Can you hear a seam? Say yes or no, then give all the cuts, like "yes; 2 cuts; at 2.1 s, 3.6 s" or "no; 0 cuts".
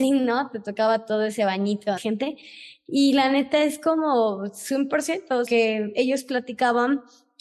yes; 2 cuts; at 2.0 s, 5.5 s